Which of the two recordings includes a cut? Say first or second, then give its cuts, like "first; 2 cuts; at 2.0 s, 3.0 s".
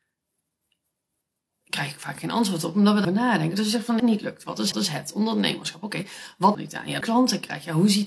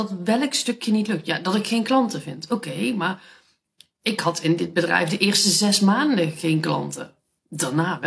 first; 5 cuts; at 3.0 s, 4.0 s, 4.7 s, 6.5 s, 7.0 s